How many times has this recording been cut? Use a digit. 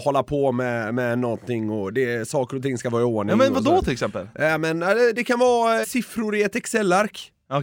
1